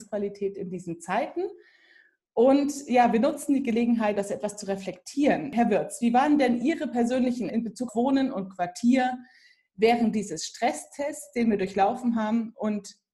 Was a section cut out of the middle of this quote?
yes; 3 cuts; at 4.2 s, 7.5 s, 7.9 s

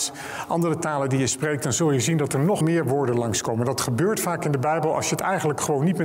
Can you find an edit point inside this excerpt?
yes; 1 cut; at 2.6 s

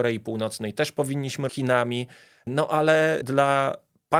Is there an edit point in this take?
yes; 1 cut; at 1.5 s

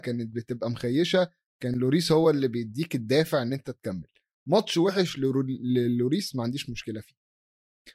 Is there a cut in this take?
no; 0 cuts

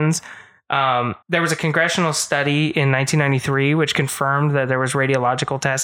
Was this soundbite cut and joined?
yes; 1 cut; at 1.2 s

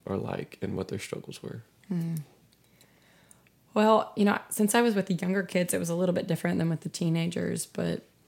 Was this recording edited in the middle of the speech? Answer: no; 0 cuts

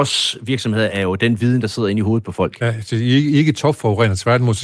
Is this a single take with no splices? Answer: yes; 0 cuts

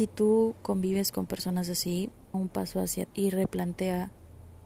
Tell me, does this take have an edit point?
yes; 2 cuts; at 2.3 s, 3.1 s

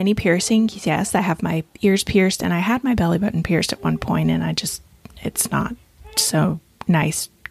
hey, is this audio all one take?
yes; 0 cuts

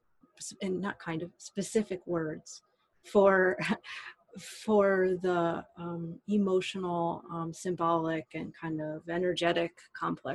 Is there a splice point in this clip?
no; 0 cuts

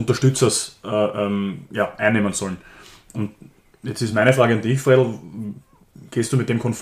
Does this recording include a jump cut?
no; 0 cuts

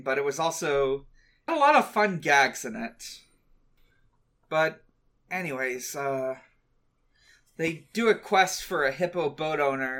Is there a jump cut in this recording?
yes; 1 cut; at 1.5 s

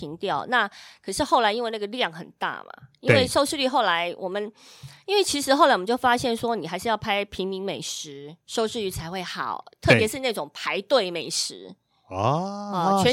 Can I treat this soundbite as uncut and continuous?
no; 1 cut; at 8.4 s

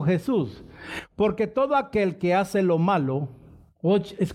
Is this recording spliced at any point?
no; 0 cuts

